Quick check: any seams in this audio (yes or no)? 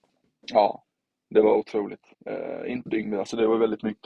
yes